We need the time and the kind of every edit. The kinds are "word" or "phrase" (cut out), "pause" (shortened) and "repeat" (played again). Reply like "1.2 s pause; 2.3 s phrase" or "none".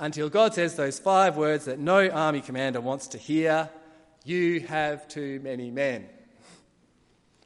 none